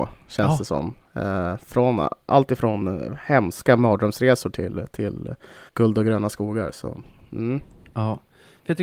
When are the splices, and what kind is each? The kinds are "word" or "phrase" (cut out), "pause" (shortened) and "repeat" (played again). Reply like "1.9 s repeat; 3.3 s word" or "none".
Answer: 5.7 s pause